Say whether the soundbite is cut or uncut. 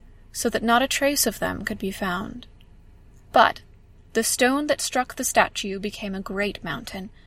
uncut